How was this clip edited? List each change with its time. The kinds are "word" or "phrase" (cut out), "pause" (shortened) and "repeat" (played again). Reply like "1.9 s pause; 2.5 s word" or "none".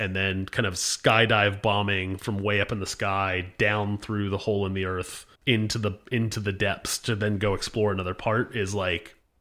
5.3 s pause